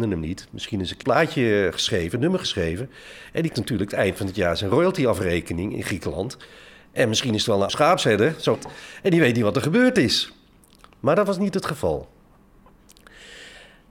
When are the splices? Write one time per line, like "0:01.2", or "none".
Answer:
0:01.0
0:03.5
0:07.7
0:08.6